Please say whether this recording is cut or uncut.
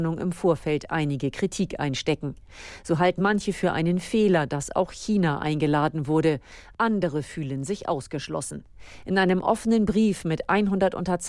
cut